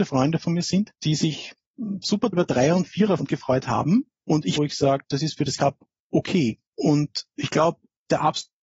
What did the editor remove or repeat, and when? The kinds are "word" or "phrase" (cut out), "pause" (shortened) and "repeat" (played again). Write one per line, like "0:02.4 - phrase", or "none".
0:00.9 - pause
0:02.3 - word
0:03.2 - word
0:04.6 - phrase
0:05.6 - phrase
0:06.7 - pause